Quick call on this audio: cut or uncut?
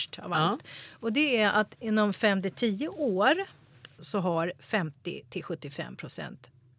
cut